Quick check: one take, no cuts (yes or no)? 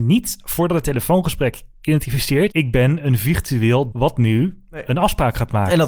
no